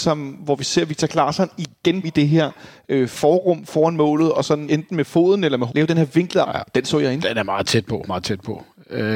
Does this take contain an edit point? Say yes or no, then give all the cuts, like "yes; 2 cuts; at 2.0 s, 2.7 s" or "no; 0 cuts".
yes; 5 cuts; at 2.0 s, 4.7 s, 5.7 s, 6.4 s, 8.1 s